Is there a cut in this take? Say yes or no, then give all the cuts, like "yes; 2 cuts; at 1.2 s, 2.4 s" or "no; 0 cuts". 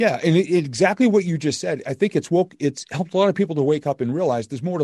no; 0 cuts